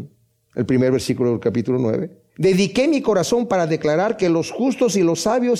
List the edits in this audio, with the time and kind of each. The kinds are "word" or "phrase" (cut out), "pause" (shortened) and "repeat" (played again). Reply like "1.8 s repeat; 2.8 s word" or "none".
2.3 s pause